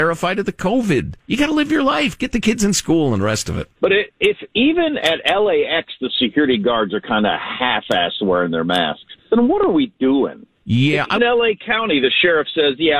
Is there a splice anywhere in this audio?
yes; 5 cuts; at 1.2 s, 3.8 s, 9.2 s, 10.6 s, 11.2 s

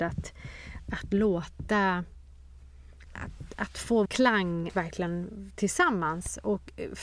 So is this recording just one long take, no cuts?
no; 4 cuts; at 3.1 s, 4.0 s, 4.7 s, 5.5 s

